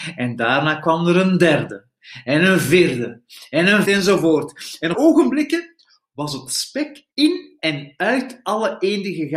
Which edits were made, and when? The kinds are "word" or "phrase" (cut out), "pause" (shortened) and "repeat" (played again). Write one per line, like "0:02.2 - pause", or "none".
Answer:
0:03.8 - phrase
0:04.9 - phrase
0:07.1 - pause